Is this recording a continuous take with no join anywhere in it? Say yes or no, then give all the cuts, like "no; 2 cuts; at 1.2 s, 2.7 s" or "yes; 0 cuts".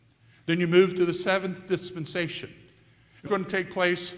no; 1 cut; at 3.3 s